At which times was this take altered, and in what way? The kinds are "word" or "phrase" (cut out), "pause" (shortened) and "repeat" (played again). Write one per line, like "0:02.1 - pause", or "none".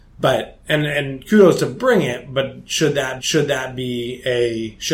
0:03.2 - repeat